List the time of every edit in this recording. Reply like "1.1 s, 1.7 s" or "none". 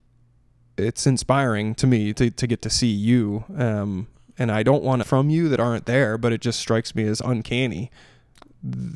5.0 s